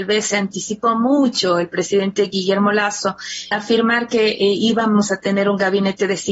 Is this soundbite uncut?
no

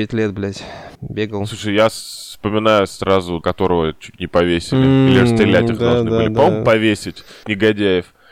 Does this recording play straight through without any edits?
no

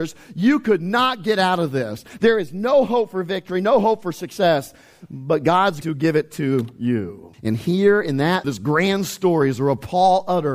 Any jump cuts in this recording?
yes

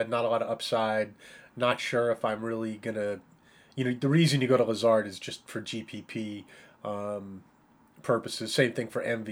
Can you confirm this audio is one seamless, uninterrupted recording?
yes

